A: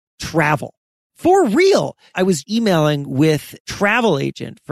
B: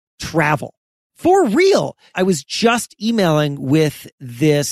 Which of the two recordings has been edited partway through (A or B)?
A